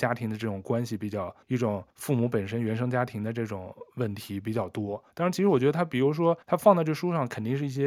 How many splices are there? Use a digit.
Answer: 4